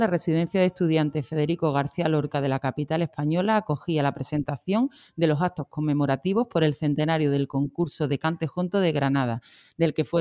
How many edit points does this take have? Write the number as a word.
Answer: zero